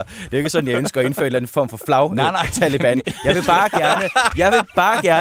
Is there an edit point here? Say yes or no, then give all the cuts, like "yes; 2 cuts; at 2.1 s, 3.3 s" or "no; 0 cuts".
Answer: no; 0 cuts